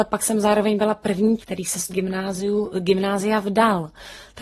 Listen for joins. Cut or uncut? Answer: cut